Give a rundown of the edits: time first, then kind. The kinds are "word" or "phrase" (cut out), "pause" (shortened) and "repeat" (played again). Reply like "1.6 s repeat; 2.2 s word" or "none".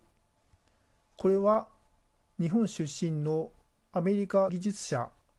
4.5 s word